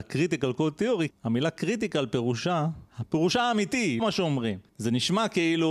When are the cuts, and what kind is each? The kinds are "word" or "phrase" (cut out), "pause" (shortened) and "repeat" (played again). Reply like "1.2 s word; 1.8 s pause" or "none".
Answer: 1.1 s word; 2.9 s pause; 4.0 s word; 4.7 s pause